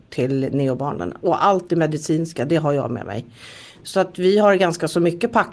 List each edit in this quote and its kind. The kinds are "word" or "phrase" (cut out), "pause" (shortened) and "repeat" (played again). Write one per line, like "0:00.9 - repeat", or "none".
none